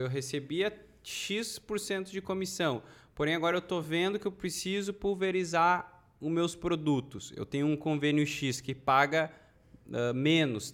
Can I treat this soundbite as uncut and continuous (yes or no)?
yes